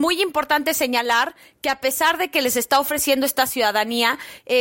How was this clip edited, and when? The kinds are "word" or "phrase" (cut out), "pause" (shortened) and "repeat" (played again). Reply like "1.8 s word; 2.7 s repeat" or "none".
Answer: none